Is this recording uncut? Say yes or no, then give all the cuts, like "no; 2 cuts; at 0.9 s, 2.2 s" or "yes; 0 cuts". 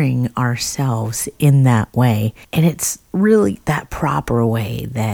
no; 1 cut; at 2.4 s